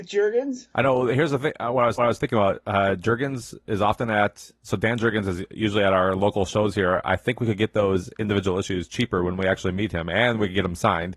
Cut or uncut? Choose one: cut